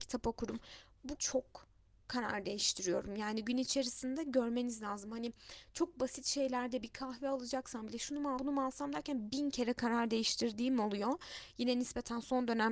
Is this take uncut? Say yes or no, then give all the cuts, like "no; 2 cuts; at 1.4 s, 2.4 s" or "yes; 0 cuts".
no; 3 cuts; at 1.2 s, 6.8 s, 8.4 s